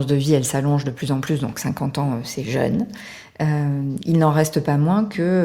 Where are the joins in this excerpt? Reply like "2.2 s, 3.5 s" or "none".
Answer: none